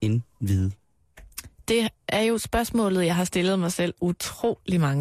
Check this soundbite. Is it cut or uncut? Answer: uncut